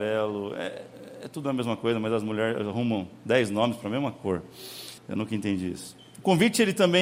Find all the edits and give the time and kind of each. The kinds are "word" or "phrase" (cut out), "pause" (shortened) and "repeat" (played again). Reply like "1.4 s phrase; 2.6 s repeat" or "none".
5.0 s pause